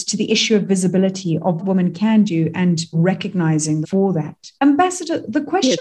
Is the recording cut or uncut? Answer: cut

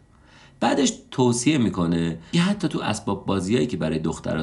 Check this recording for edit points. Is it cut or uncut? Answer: cut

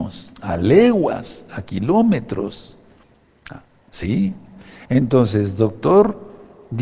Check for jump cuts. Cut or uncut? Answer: uncut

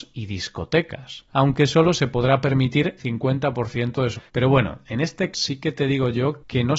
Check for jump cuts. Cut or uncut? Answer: cut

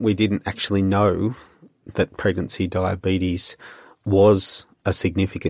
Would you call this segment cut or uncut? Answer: uncut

